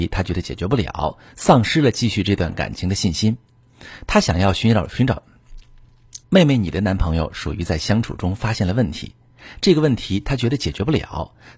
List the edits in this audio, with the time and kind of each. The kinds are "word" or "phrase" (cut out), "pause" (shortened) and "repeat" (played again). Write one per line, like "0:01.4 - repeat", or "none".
0:06.2 - pause

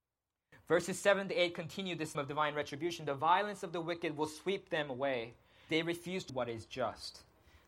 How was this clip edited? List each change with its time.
0:02.1 - word
0:05.7 - word
0:06.3 - word

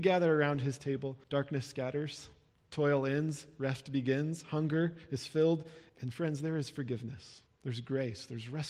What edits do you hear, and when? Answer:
0:01.2 - pause
0:02.5 - pause
0:05.9 - pause
0:07.5 - pause

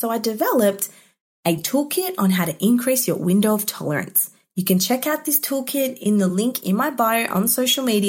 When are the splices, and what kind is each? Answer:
none

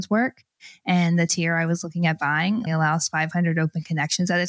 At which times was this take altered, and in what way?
0:02.7 - word

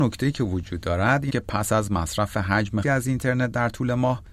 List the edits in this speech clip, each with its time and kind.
0:01.3 - word
0:02.8 - word

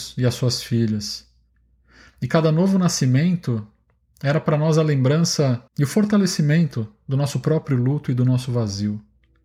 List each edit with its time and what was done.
0:05.7 - pause

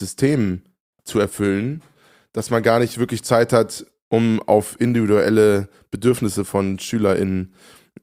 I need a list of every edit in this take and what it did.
none

